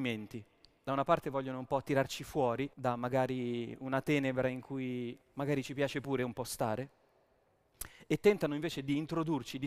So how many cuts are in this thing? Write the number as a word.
two